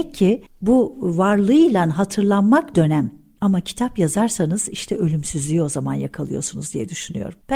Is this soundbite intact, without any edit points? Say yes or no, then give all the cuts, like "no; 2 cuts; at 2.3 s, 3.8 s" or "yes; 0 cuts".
no; 1 cut; at 2.7 s